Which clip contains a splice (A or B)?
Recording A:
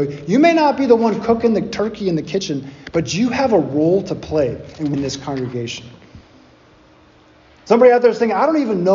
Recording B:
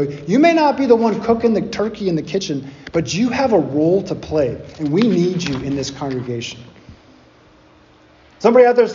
A